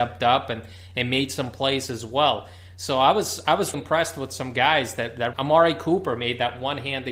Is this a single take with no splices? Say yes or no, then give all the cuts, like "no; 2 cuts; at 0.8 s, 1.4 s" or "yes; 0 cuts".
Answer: no; 2 cuts; at 3.7 s, 5.3 s